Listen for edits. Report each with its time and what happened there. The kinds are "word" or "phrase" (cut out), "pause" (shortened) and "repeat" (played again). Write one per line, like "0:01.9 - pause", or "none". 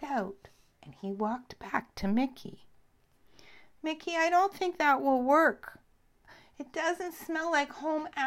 none